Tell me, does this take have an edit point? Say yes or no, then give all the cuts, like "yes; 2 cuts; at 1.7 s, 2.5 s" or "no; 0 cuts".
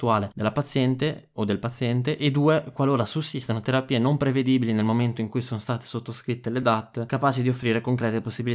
no; 0 cuts